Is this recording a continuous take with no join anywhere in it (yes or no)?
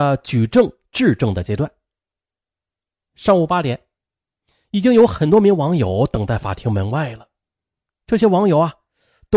yes